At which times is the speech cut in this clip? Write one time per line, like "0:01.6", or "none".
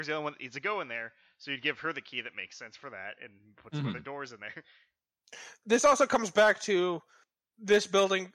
none